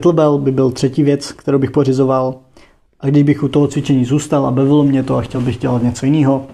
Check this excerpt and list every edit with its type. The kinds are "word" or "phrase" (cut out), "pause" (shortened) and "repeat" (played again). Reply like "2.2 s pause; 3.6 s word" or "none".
none